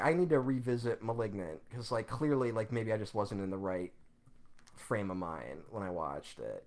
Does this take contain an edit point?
no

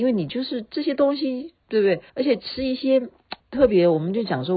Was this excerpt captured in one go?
no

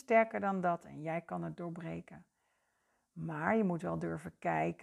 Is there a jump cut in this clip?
no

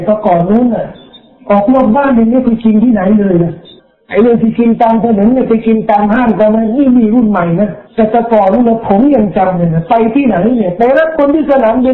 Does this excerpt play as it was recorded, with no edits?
no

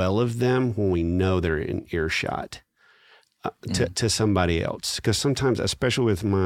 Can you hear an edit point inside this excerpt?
no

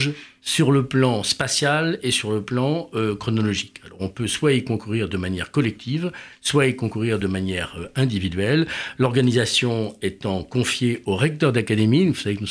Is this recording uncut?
yes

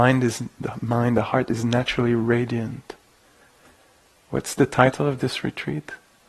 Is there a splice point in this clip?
no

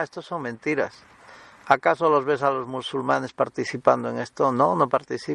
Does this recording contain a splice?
no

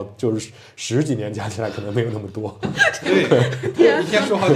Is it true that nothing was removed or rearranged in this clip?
yes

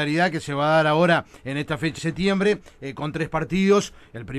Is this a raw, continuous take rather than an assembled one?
no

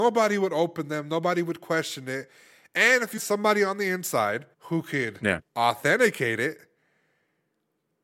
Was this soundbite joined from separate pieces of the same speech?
yes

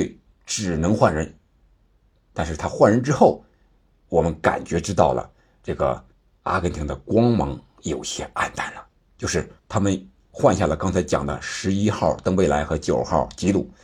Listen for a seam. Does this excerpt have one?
yes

